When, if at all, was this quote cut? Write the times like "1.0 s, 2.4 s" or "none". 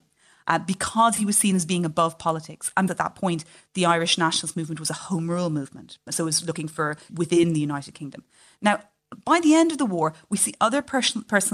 2.9 s, 6.1 s, 7.1 s

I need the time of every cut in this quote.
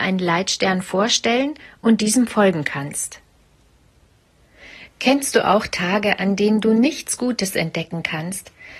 none

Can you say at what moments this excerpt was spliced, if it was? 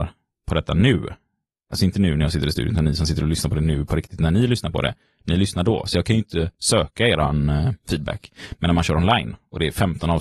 none

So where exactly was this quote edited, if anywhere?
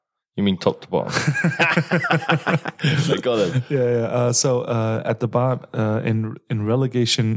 none

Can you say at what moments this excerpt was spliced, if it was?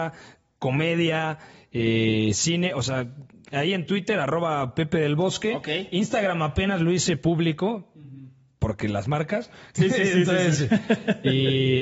none

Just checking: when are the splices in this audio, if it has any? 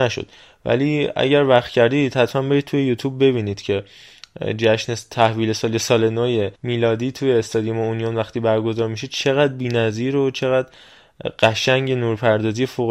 6.5 s

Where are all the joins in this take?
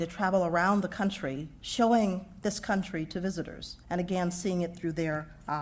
3.8 s

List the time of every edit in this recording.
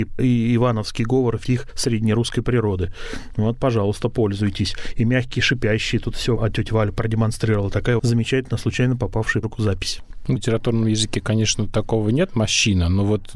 1.4 s, 6.4 s, 8.0 s, 9.4 s, 10.4 s

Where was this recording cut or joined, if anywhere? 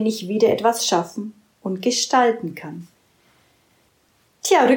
none

